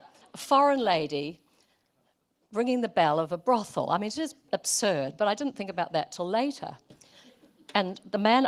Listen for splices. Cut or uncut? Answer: uncut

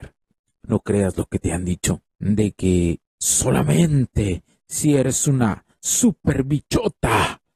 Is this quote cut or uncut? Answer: cut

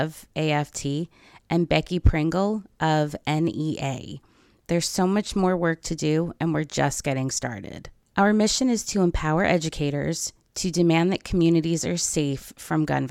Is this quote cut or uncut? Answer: uncut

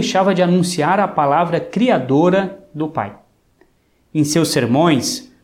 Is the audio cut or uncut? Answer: uncut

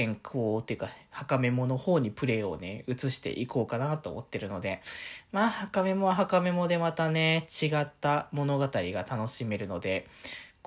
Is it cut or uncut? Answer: uncut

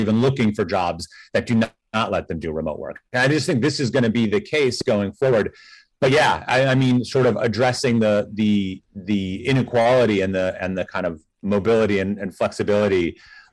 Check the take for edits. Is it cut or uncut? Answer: uncut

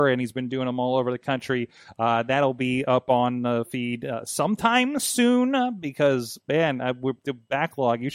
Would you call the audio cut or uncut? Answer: uncut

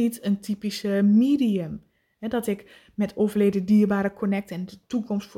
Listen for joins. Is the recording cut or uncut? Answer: uncut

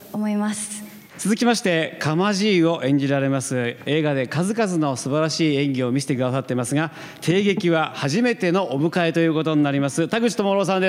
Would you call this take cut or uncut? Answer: cut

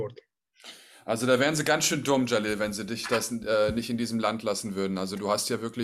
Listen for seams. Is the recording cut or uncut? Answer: uncut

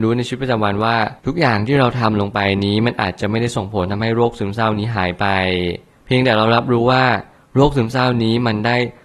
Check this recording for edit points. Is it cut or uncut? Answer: cut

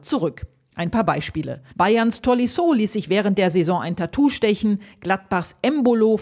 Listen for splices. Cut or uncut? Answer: cut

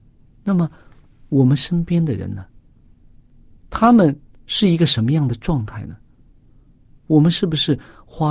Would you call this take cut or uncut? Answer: uncut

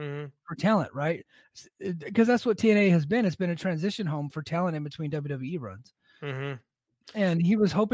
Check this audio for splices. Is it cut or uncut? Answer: uncut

